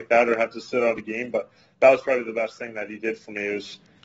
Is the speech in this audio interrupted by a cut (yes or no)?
no